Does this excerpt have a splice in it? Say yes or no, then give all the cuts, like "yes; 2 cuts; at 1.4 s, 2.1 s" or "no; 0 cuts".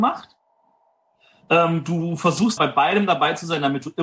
yes; 1 cut; at 2.6 s